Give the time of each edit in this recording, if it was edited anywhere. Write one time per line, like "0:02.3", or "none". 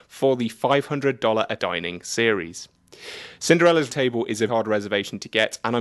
0:01.6
0:03.9
0:04.5